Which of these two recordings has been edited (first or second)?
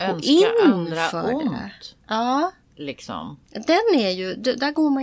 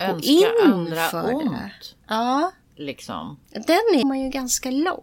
second